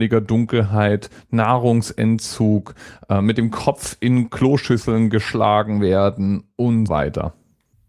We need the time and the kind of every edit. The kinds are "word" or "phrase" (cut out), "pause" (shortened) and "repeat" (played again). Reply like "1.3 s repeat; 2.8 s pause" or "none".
6.9 s word